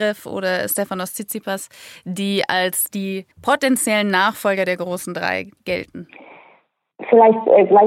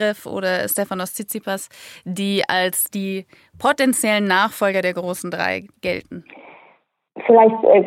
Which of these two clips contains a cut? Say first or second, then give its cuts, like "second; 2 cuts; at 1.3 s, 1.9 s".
first; 1 cut; at 3.3 s